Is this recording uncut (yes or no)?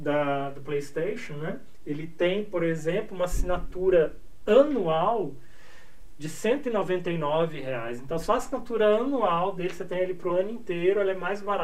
yes